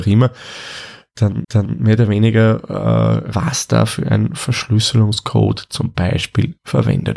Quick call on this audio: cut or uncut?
cut